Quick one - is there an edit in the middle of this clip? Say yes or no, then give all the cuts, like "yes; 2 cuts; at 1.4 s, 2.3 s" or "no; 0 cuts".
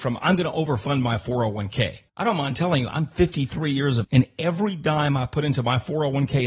yes; 2 cuts; at 2.1 s, 4.0 s